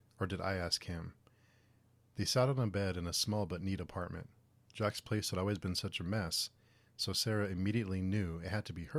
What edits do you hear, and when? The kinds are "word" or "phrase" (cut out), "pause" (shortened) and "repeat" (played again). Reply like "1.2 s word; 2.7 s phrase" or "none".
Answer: none